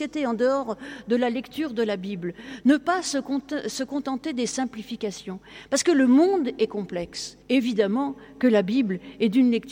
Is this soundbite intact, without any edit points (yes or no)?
no